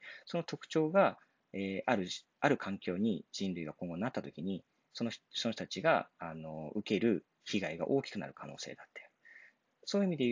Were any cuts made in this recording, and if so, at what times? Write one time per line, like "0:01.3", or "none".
none